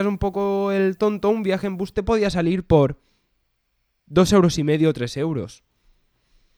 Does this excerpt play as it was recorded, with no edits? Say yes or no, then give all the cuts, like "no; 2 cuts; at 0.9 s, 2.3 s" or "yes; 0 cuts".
yes; 0 cuts